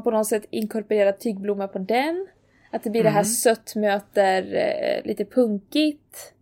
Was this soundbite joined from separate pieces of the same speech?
no; 0 cuts

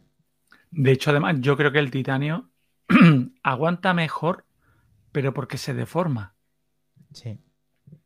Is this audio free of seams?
yes; 0 cuts

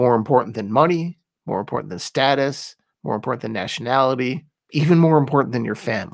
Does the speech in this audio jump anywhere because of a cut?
no; 0 cuts

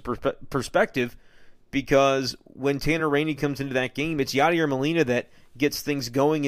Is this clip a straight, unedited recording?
yes; 0 cuts

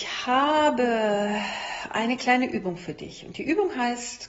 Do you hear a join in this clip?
no; 0 cuts

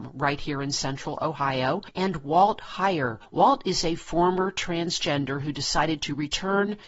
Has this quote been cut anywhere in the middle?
no; 0 cuts

